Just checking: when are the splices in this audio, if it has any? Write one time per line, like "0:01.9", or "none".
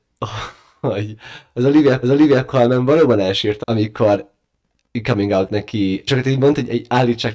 0:02.0
0:03.6
0:05.5
0:06.1